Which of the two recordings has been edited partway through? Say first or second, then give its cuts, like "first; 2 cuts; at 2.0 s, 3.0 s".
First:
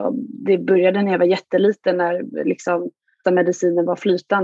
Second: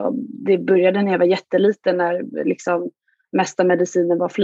first; 1 cut; at 3.2 s